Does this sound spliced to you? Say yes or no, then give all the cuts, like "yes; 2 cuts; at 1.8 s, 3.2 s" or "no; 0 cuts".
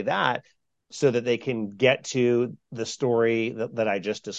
no; 0 cuts